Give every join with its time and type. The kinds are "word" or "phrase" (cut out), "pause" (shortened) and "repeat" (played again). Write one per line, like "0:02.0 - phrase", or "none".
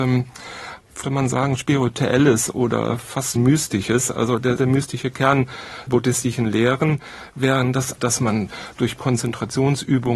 0:01.0 - word
0:03.4 - word
0:04.6 - word
0:05.9 - word
0:08.0 - word
0:09.0 - word